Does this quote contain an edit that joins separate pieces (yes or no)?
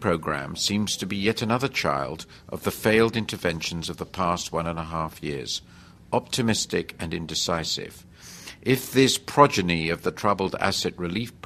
no